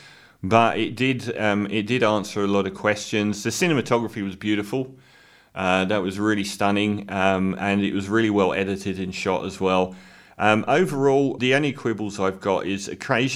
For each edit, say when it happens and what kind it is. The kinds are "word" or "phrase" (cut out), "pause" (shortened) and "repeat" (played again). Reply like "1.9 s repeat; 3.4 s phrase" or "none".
11.4 s word